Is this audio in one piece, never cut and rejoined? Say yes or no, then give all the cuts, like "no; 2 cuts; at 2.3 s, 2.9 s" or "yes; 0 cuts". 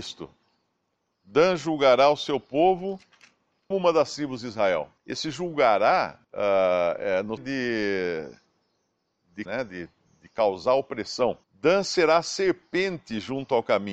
no; 6 cuts; at 3.7 s, 5.0 s, 6.2 s, 7.4 s, 9.5 s, 11.4 s